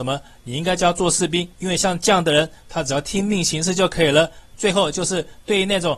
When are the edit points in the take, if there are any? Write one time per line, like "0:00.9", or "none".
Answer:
0:01.5